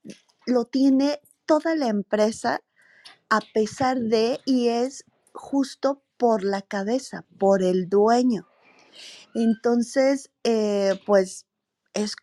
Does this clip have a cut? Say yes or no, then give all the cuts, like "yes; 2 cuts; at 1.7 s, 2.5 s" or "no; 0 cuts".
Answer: no; 0 cuts